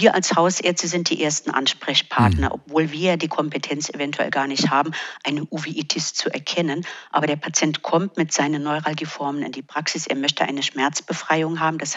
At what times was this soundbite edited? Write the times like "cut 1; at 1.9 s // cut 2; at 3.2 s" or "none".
none